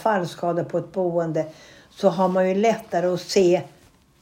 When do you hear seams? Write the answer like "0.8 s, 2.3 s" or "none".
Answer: none